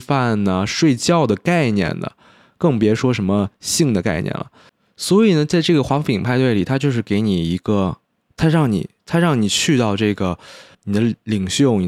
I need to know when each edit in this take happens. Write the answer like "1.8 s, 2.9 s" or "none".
10.7 s